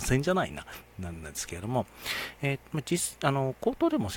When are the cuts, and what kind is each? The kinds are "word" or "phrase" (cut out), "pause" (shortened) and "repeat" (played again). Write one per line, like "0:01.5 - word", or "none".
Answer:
0:02.6 - word